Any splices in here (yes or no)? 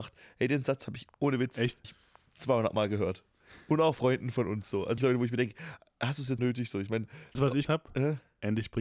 yes